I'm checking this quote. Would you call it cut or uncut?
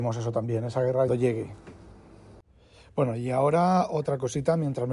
cut